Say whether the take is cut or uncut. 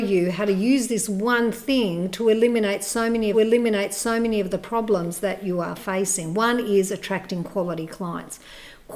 cut